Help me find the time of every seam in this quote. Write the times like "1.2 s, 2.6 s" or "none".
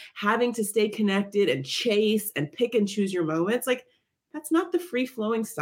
none